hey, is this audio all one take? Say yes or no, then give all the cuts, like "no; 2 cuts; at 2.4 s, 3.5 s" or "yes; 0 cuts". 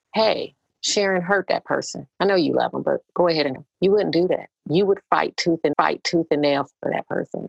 no; 4 cuts; at 2.1 s, 3.6 s, 4.6 s, 5.7 s